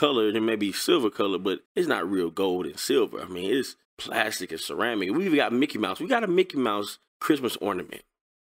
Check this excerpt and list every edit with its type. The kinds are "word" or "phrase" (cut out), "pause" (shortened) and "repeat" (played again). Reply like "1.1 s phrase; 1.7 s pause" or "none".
1.7 s pause; 3.8 s pause; 7.1 s pause